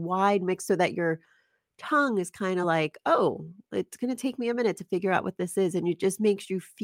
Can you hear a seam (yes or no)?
no